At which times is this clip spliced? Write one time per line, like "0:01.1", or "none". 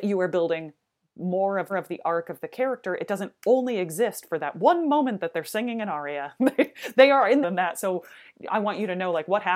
0:01.7
0:07.4